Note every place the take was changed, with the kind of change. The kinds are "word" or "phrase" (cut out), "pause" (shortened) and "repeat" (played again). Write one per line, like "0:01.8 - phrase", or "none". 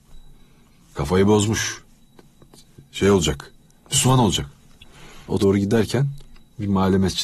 0:05.4 - word